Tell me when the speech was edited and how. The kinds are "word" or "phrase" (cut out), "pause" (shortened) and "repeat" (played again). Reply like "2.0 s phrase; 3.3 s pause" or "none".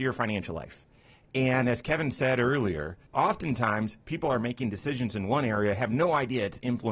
3.1 s pause